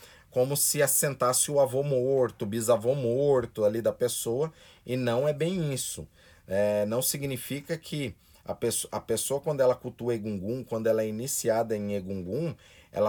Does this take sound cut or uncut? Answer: uncut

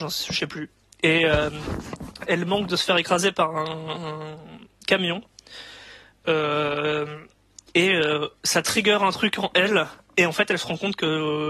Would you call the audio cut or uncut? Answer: uncut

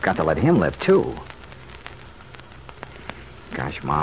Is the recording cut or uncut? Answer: uncut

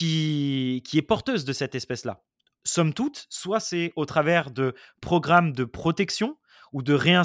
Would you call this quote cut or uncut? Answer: uncut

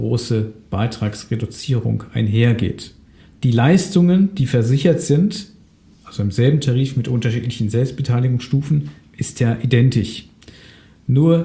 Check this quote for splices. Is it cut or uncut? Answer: cut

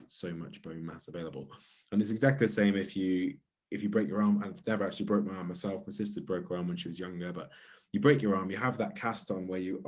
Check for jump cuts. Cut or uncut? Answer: uncut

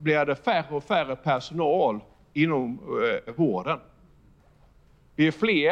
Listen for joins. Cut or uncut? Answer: cut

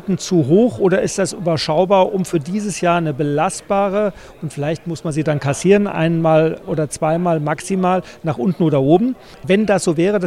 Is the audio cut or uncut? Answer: uncut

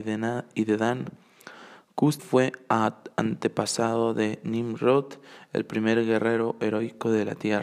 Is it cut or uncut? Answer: cut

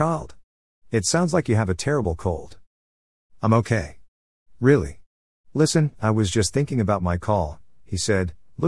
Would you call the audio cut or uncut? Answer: uncut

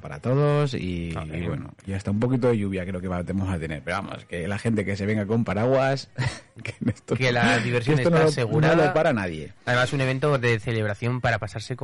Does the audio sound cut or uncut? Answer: uncut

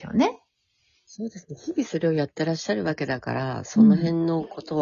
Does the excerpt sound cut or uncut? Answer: uncut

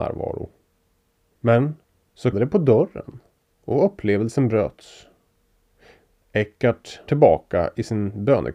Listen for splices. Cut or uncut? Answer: cut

